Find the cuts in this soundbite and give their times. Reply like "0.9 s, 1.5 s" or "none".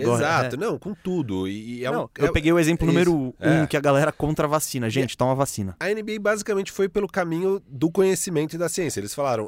none